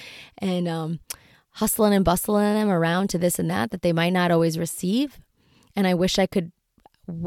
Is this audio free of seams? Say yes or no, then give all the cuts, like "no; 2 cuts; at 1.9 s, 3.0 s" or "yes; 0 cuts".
yes; 0 cuts